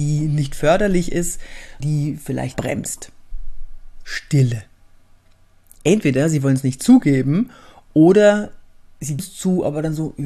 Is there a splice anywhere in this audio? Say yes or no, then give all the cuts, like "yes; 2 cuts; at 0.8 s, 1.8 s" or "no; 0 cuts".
yes; 3 cuts; at 1.8 s, 2.5 s, 9.2 s